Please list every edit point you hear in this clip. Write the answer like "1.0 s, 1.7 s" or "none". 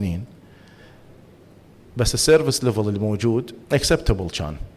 3.6 s